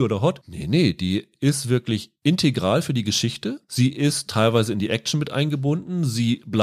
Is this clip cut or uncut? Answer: uncut